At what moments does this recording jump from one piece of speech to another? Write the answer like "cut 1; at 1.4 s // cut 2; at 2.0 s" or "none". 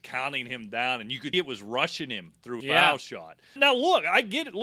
cut 1; at 1.3 s // cut 2; at 2.6 s // cut 3; at 3.6 s